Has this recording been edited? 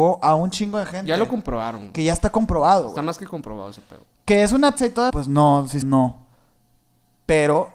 yes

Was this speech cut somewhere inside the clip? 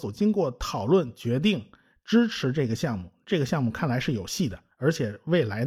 no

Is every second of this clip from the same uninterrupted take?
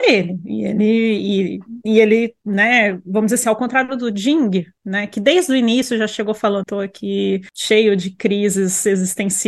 no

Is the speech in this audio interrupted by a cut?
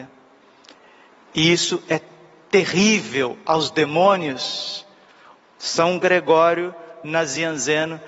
no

